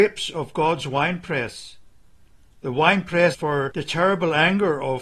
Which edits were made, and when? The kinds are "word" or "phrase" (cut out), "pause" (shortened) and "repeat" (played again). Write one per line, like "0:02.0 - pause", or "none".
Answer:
0:03.3 - word